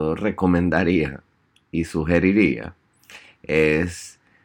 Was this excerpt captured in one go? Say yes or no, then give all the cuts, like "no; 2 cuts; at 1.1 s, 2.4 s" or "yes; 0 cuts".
yes; 0 cuts